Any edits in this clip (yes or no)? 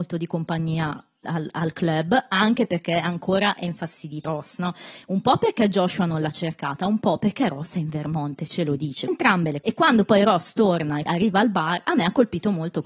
yes